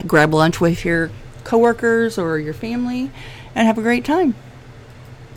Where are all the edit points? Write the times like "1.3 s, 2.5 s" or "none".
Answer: none